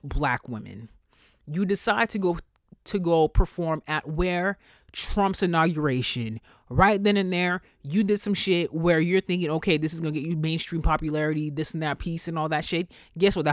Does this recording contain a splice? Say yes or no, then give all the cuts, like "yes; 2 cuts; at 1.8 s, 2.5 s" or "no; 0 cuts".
no; 0 cuts